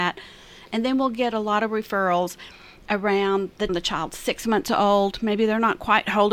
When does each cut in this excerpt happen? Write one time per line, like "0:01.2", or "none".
0:03.7